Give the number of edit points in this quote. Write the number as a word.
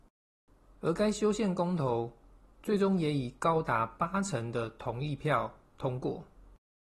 zero